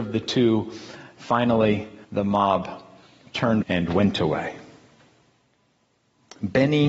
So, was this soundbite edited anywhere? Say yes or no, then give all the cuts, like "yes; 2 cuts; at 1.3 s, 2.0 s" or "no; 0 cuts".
yes; 2 cuts; at 2.0 s, 3.6 s